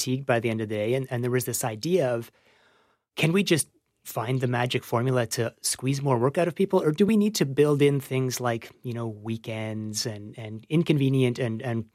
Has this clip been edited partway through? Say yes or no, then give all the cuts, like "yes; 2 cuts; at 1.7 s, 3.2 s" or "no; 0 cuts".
no; 0 cuts